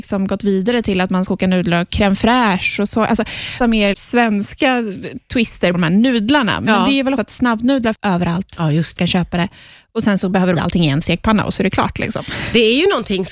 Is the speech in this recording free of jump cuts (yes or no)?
no